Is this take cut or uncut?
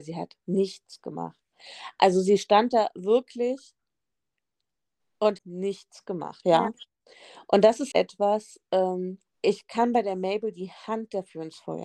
cut